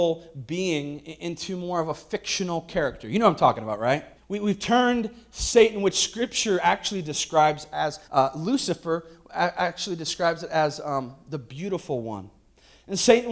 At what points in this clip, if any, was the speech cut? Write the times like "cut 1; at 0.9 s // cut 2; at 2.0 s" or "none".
cut 1; at 4.2 s // cut 2; at 8.0 s